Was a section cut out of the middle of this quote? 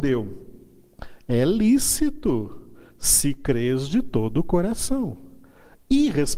no; 0 cuts

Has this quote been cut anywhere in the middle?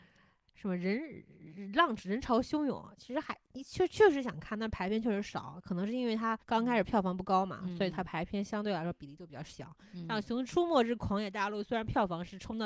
yes; 1 cut; at 6.4 s

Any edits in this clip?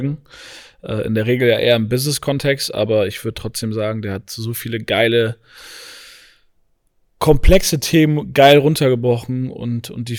no; 0 cuts

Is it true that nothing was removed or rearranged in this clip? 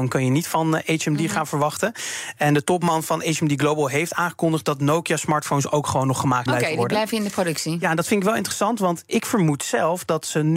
no; 1 cut; at 6.5 s

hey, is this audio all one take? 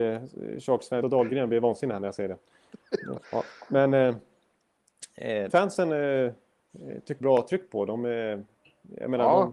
no; 4 cuts; at 1.0 s, 3.2 s, 5.5 s, 7.2 s

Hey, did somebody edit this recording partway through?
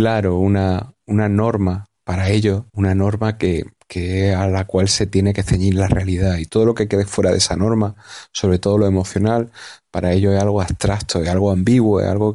yes; 2 cuts; at 2.0 s, 2.7 s

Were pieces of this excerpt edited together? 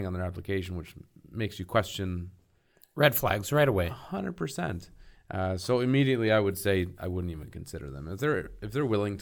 no; 0 cuts

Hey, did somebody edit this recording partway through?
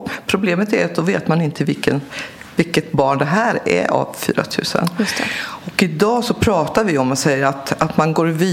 no; 0 cuts

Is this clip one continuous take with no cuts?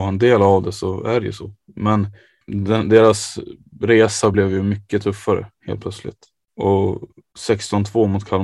yes; 0 cuts

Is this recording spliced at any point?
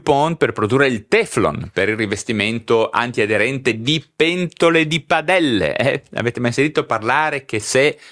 no; 0 cuts

